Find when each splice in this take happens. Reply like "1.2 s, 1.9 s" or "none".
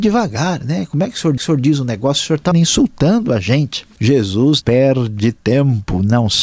1.4 s, 2.5 s, 4.6 s